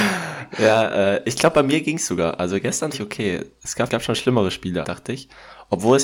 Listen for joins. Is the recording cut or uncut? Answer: cut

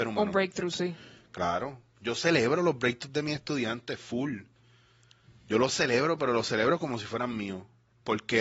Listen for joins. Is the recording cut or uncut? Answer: uncut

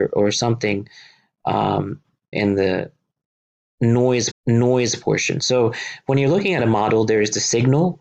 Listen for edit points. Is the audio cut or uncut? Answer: cut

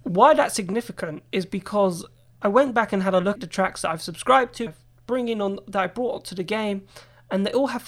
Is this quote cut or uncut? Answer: cut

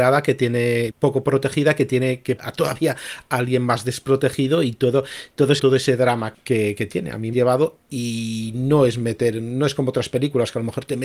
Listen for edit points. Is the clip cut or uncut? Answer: cut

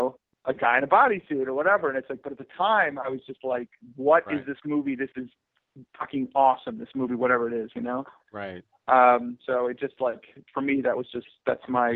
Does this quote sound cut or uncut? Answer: uncut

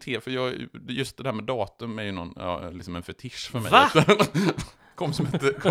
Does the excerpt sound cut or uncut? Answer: uncut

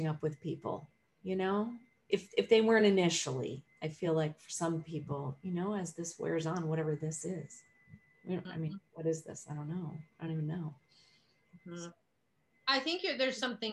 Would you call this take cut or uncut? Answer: uncut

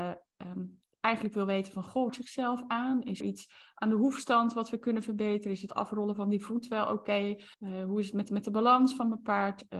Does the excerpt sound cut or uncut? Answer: cut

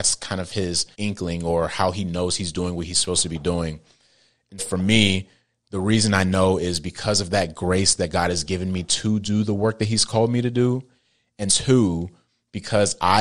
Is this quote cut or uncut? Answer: cut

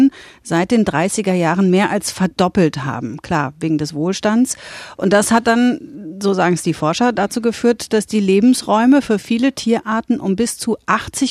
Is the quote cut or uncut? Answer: uncut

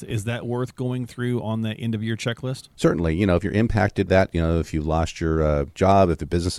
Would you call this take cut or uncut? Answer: cut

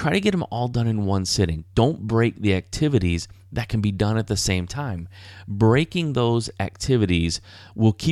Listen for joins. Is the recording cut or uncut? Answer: uncut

